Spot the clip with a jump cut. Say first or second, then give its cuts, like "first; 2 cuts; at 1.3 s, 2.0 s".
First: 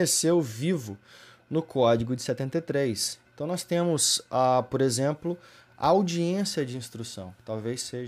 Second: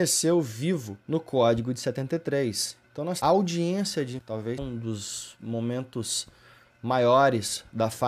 second; 4 cuts; at 1.0 s, 3.2 s, 4.2 s, 4.6 s